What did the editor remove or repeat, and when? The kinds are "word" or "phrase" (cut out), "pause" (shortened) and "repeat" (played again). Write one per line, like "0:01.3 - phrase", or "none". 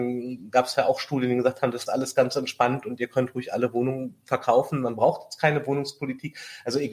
0:01.9 - phrase